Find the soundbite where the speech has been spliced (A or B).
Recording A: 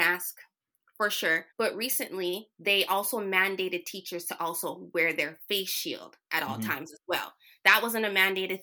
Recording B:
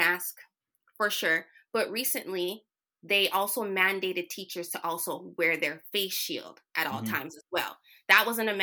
A